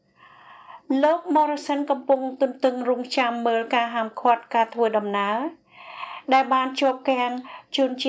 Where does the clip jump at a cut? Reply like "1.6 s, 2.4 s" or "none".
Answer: none